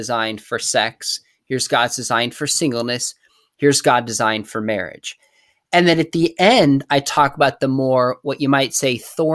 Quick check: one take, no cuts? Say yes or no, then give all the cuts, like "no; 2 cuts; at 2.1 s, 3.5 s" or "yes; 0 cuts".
yes; 0 cuts